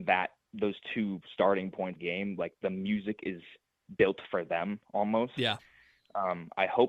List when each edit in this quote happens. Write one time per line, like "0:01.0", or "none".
0:02.0